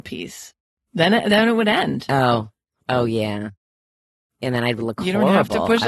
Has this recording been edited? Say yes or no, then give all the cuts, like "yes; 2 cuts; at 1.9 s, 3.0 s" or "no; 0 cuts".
no; 0 cuts